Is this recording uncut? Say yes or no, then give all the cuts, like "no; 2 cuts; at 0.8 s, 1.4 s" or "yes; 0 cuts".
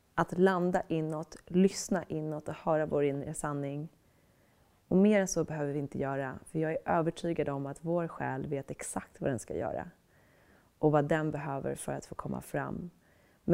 yes; 0 cuts